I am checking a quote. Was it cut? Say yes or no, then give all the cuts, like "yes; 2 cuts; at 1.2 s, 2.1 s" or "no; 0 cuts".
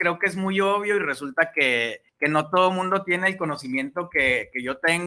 yes; 1 cut; at 2.1 s